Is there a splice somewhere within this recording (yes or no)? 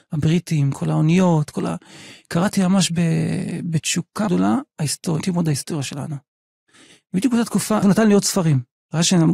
yes